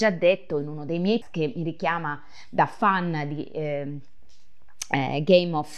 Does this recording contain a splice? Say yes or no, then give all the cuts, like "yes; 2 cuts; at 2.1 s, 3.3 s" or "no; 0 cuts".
yes; 1 cut; at 1.2 s